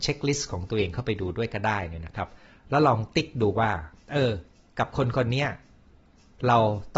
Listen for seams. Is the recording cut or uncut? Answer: uncut